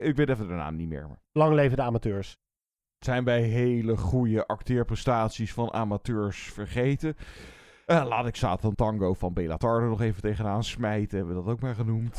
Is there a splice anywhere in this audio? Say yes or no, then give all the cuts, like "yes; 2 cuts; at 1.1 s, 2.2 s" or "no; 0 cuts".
no; 0 cuts